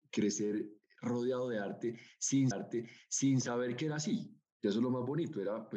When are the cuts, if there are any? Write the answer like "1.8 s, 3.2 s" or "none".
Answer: 2.5 s, 4.5 s